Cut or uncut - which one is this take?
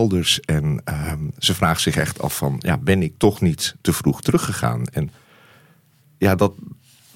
uncut